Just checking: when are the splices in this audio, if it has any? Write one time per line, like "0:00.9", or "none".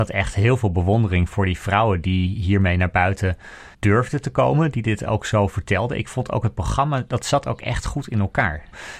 0:03.7